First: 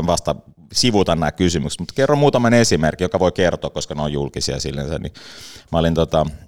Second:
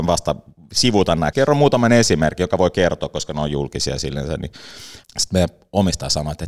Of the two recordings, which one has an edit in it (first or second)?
second